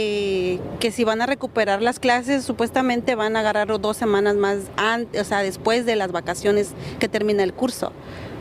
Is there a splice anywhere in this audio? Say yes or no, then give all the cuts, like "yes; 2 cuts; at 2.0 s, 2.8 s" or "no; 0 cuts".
no; 0 cuts